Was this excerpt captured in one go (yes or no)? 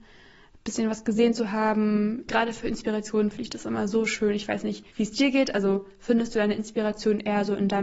no